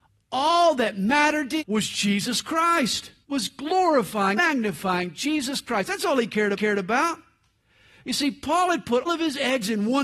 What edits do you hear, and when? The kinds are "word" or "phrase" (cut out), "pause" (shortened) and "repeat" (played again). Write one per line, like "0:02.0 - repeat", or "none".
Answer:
0:01.6 - word
0:03.2 - pause
0:04.4 - word
0:06.5 - repeat
0:09.1 - word